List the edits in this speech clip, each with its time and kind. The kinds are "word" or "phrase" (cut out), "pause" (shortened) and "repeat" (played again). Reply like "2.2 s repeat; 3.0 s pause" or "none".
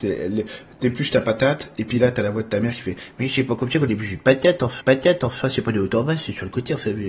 4.8 s repeat